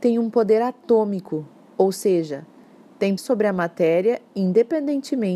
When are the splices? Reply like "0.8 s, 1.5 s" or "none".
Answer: 3.2 s